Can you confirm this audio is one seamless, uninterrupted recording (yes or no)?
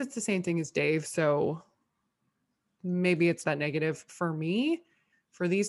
no